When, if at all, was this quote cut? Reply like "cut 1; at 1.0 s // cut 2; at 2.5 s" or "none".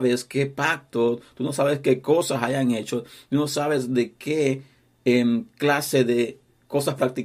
none

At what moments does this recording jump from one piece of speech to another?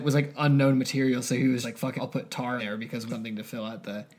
cut 1; at 1.6 s // cut 2; at 2.0 s // cut 3; at 2.6 s // cut 4; at 3.1 s

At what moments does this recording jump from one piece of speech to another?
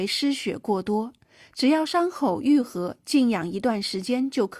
none

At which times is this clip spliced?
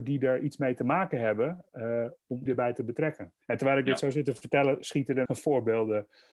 cut 1; at 2.5 s // cut 2; at 3.4 s // cut 3; at 5.3 s

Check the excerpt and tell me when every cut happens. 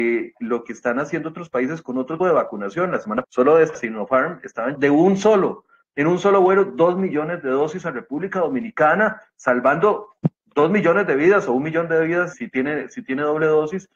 cut 1; at 2.2 s // cut 2; at 3.2 s // cut 3; at 3.7 s // cut 4; at 4.7 s // cut 5; at 12.3 s

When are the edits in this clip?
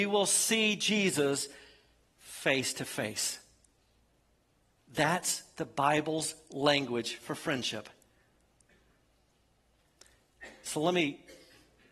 none

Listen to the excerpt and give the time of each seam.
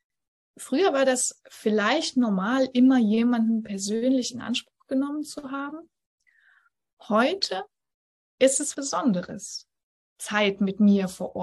cut 1; at 8.7 s

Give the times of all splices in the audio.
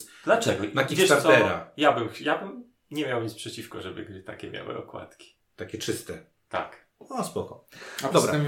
none

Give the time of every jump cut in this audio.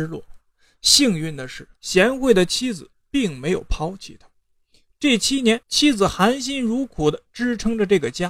cut 1; at 1.8 s // cut 2; at 5.6 s

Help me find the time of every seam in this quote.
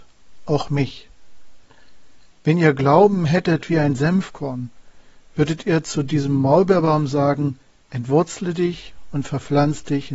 none

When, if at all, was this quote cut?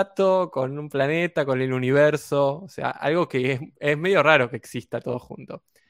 none

